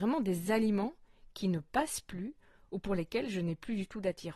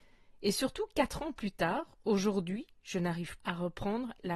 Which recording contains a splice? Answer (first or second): second